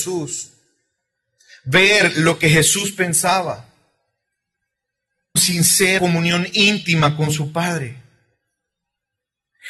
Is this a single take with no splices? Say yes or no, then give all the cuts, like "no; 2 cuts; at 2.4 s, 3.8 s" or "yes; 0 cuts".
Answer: no; 2 cuts; at 5.4 s, 6.0 s